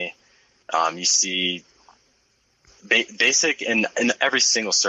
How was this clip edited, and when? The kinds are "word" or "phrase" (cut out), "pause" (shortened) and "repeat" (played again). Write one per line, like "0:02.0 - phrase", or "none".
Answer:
none